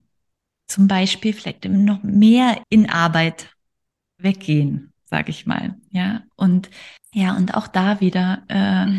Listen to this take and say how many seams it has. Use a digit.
1